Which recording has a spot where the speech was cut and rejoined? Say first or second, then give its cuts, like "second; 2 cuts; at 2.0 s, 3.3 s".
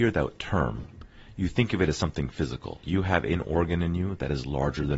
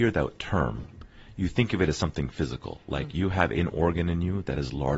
first; 1 cut; at 2.8 s